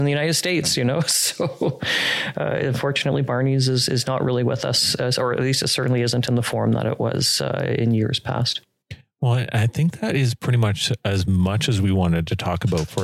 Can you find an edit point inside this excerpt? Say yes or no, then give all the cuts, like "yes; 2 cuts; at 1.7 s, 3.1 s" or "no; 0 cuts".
no; 0 cuts